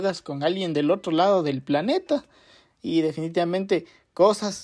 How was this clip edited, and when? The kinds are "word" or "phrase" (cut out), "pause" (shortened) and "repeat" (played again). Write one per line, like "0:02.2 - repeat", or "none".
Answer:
none